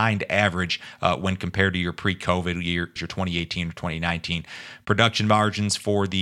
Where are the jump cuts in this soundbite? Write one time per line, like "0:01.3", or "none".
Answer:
0:03.0